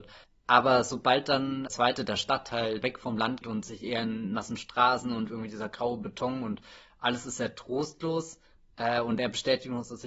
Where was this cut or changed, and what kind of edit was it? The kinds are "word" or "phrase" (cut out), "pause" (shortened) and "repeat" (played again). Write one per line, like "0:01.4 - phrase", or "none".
0:01.7 - phrase
0:02.8 - phrase
0:03.4 - word